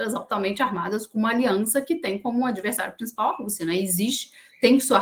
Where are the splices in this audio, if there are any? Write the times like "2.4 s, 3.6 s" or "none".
none